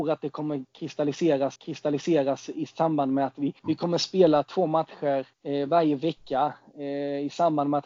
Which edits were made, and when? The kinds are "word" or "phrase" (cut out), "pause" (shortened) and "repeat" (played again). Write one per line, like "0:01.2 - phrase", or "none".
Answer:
0:01.6 - repeat
0:03.6 - pause
0:05.3 - pause